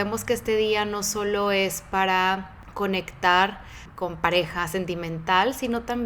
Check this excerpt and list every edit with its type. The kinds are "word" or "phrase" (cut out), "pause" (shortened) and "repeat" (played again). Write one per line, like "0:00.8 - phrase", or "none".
none